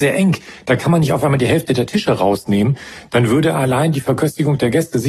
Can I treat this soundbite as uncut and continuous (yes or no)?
yes